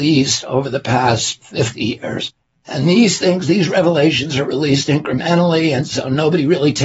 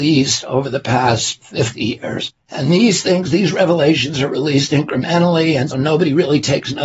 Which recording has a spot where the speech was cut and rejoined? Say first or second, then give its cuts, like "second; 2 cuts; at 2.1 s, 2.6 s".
second; 2 cuts; at 2.4 s, 5.7 s